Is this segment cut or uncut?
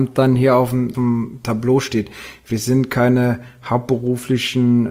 cut